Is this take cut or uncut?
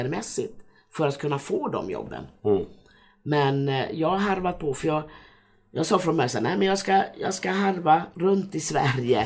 uncut